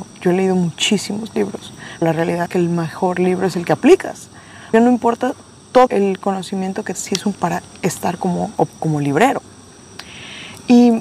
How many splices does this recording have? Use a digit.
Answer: 7